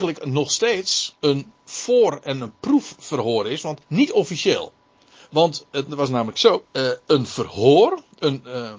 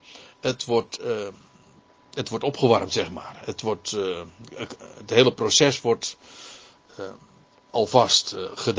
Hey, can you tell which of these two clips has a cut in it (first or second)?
first